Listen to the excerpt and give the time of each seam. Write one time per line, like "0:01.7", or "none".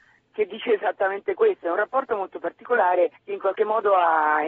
0:03.2